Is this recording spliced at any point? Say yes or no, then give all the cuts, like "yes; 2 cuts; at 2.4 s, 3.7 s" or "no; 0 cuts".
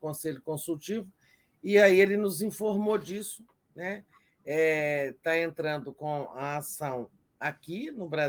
no; 0 cuts